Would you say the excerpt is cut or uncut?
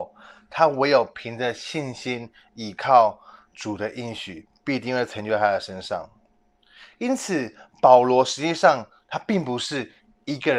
uncut